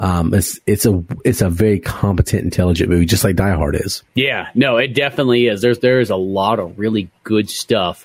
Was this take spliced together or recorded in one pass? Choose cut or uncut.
cut